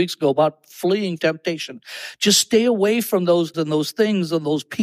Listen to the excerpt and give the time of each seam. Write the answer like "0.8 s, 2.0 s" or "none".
1.2 s, 3.5 s